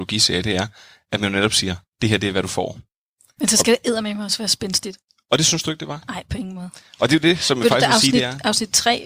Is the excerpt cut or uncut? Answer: uncut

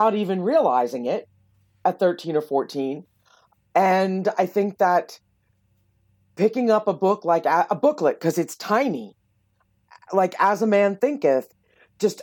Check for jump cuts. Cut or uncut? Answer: uncut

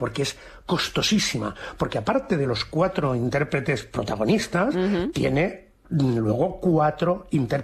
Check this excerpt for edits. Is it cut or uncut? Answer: uncut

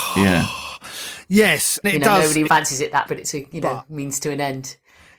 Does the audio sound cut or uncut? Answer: cut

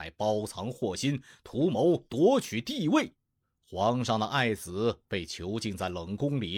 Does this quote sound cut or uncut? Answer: cut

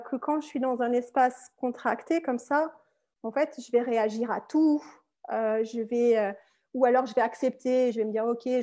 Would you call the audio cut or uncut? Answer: uncut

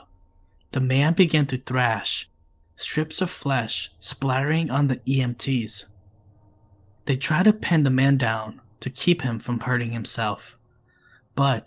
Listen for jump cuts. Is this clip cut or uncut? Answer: uncut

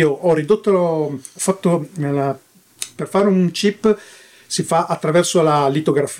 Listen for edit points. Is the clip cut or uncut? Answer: uncut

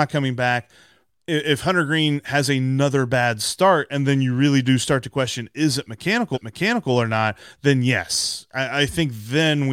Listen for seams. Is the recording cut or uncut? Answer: cut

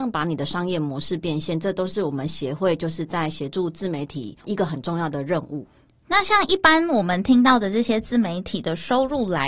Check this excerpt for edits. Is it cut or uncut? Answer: uncut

